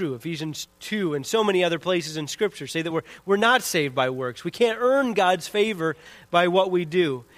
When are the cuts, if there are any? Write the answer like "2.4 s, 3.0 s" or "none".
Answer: none